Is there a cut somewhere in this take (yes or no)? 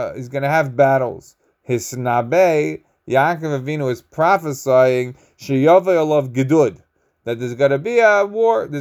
no